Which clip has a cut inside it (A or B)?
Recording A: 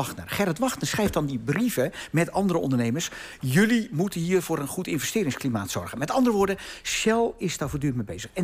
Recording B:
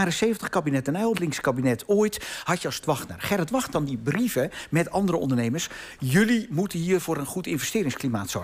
B